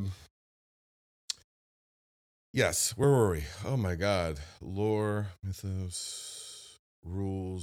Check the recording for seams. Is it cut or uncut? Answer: uncut